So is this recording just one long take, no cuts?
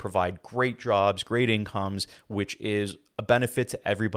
yes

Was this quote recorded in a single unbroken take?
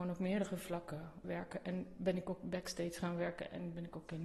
no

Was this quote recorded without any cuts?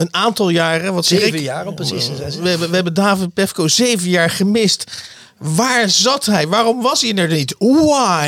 yes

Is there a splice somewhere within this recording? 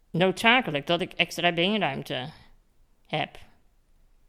no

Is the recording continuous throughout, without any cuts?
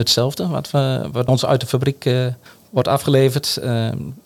no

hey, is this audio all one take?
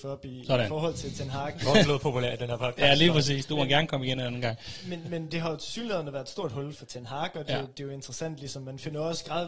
no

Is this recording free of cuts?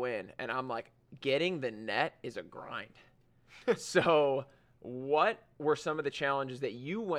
yes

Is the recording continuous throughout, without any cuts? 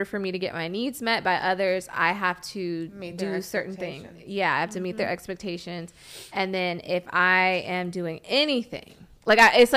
yes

